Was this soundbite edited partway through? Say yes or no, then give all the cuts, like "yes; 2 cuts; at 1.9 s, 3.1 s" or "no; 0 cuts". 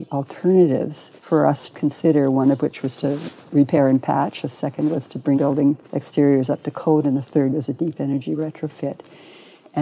yes; 5 cuts; at 1.2 s, 1.7 s, 3.0 s, 5.4 s, 5.8 s